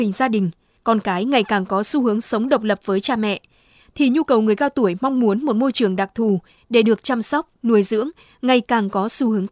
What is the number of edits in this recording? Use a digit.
0